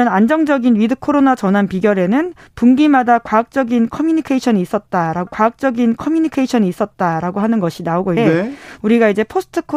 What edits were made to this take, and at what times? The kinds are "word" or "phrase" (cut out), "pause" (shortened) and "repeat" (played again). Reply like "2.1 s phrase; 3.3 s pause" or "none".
5.3 s repeat; 8.2 s word